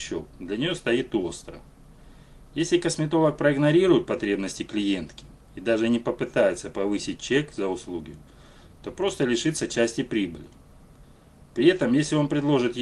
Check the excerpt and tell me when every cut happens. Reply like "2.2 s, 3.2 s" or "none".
none